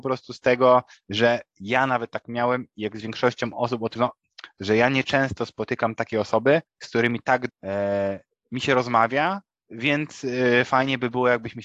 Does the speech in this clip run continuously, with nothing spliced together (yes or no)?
no